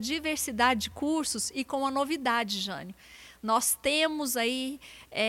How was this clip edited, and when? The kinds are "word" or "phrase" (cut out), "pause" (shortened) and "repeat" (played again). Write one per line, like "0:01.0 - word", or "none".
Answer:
none